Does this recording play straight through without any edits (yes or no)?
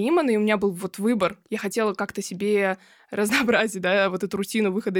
yes